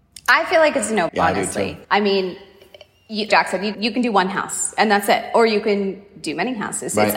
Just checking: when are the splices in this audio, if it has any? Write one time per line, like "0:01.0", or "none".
0:01.1
0:01.8
0:03.3
0:03.7